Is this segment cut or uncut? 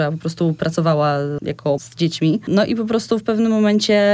cut